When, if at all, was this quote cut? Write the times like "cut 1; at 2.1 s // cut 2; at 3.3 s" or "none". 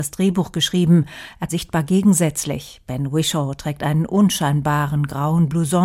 cut 1; at 1.5 s